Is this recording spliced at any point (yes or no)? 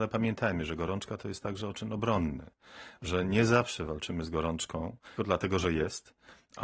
yes